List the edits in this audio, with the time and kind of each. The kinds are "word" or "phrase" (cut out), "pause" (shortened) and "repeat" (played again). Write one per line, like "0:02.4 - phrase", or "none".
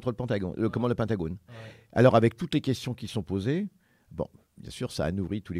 none